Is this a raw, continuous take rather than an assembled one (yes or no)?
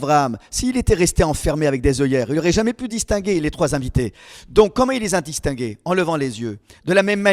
yes